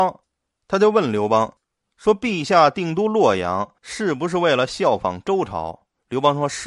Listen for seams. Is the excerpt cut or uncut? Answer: cut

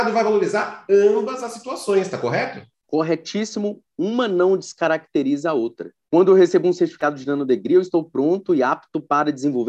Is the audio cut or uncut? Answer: uncut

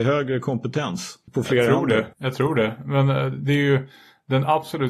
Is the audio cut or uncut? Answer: cut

